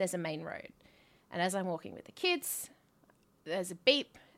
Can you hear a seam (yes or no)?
no